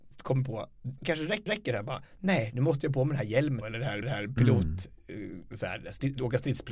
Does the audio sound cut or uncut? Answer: cut